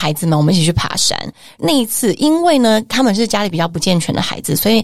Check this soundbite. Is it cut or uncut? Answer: uncut